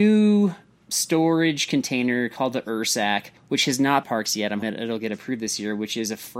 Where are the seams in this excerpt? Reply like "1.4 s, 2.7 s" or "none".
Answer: 3.4 s, 4.0 s, 4.6 s